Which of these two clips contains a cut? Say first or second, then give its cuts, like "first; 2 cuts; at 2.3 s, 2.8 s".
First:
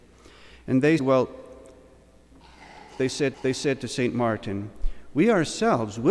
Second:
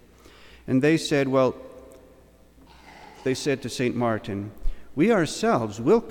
first; 2 cuts; at 1.0 s, 3.3 s